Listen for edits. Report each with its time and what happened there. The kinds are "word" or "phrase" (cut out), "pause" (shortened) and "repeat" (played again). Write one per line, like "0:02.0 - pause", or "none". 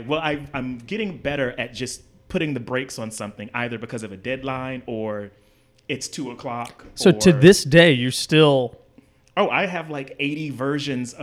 none